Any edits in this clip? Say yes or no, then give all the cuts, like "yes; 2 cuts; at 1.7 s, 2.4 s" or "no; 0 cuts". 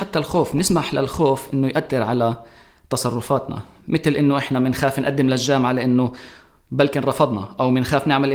no; 0 cuts